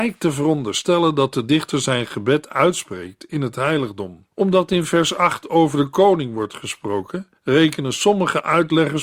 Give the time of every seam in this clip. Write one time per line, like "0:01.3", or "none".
0:04.3
0:07.4